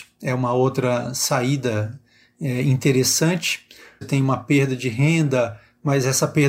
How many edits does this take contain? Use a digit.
1